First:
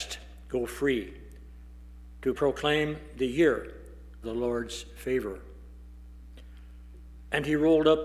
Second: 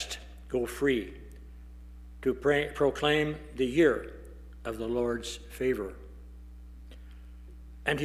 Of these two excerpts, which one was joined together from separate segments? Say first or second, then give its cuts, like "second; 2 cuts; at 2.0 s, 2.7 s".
first; 2 cuts; at 2.3 s, 4.2 s